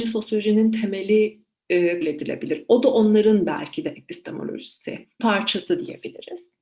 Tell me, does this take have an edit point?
yes; 2 cuts; at 2.0 s, 5.2 s

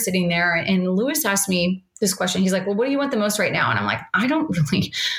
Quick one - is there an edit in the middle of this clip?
no; 0 cuts

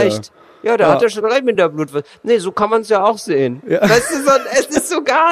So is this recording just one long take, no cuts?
yes; 0 cuts

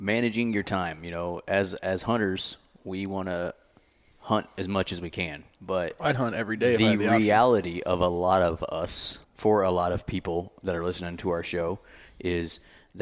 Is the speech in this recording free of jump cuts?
no; 2 cuts; at 5.5 s, 9.2 s

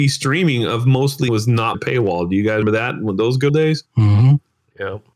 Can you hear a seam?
yes; 5 cuts; at 1.3 s, 1.7 s, 2.6 s, 3.5 s, 3.9 s

